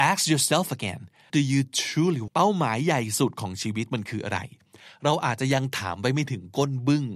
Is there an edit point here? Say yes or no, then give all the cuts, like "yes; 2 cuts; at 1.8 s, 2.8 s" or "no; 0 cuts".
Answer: yes; 2 cuts; at 1.3 s, 2.3 s